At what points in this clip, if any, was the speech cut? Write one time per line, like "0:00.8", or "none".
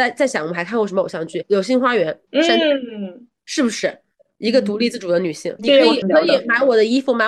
0:05.6
0:06.0

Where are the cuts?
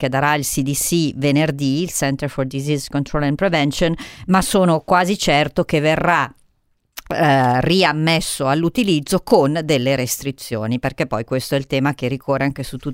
none

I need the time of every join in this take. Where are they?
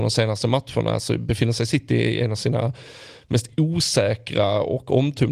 none

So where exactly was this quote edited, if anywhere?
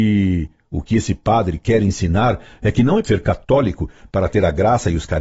0:03.0

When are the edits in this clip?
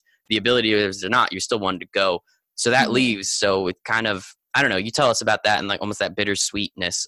none

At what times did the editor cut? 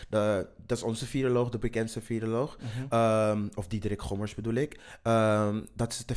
none

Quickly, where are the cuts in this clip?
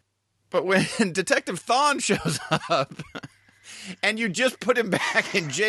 none

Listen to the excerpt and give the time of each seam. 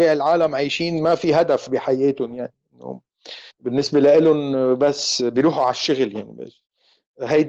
0:03.5

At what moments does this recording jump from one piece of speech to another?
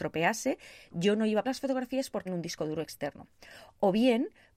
0:01.4
0:02.3

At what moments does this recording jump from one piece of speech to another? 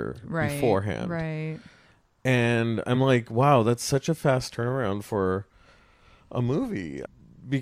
none

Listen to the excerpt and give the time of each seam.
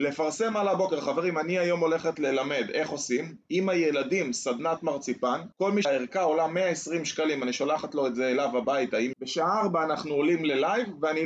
0:05.5
0:05.8
0:09.1

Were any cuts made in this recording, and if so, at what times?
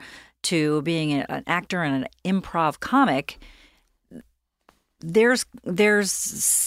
none

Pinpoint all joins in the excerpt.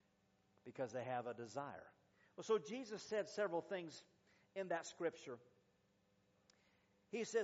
0:02.1

